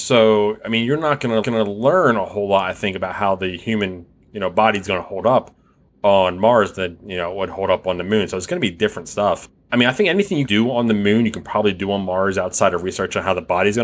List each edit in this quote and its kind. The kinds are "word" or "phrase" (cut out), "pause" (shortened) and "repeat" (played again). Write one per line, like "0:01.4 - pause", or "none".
0:01.4 - repeat
0:10.5 - word